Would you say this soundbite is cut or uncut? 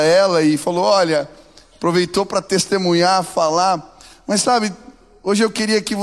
uncut